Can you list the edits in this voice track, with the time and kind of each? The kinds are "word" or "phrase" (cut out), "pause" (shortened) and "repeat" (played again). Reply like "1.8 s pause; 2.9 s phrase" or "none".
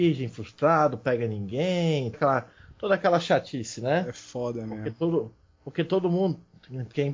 2.1 s word